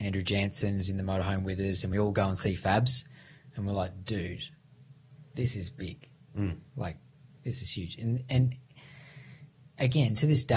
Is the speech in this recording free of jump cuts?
yes; 0 cuts

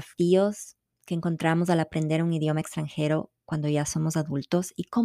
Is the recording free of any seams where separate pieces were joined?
yes; 0 cuts

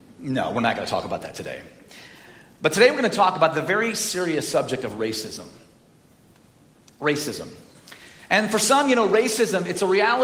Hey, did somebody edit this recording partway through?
no; 0 cuts

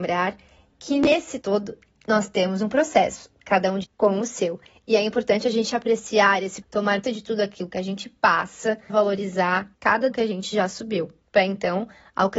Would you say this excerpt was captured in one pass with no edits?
no; 6 cuts; at 1.4 s, 3.8 s, 6.6 s, 7.0 s, 8.9 s, 10.1 s

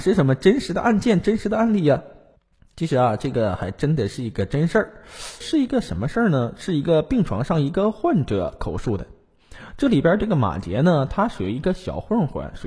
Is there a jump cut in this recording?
yes; 2 cuts; at 2.4 s, 5.4 s

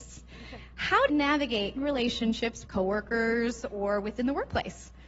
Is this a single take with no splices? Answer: no; 4 cuts; at 1.1 s, 1.8 s, 2.7 s, 4.2 s

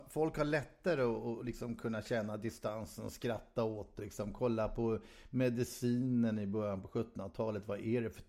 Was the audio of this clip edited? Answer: yes; 1 cut; at 4.0 s

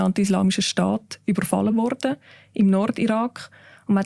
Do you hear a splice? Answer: no; 0 cuts

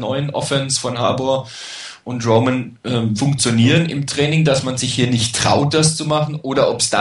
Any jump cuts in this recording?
yes; 1 cut; at 3.2 s

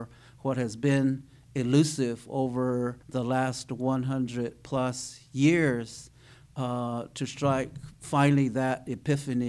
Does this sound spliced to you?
yes; 1 cut; at 3.0 s

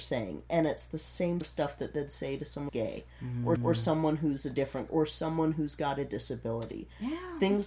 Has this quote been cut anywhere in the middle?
yes; 4 cuts; at 1.4 s, 2.7 s, 3.6 s, 4.9 s

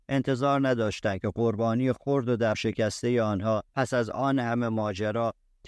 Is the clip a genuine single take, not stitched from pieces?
no; 2 cuts; at 2.5 s, 3.7 s

